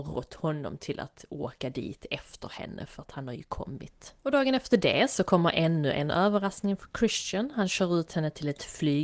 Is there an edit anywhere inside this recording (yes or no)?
yes